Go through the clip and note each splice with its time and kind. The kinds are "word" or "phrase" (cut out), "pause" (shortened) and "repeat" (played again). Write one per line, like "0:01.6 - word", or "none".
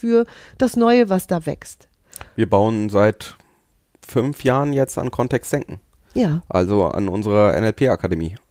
none